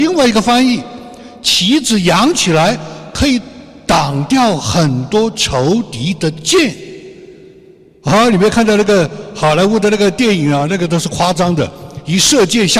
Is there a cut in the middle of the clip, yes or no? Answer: no